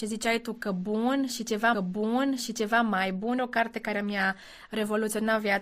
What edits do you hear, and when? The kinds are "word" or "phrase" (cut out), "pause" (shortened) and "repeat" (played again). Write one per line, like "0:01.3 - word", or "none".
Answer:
0:01.7 - repeat
0:03.4 - phrase